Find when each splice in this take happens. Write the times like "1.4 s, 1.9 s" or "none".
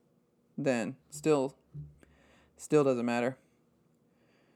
none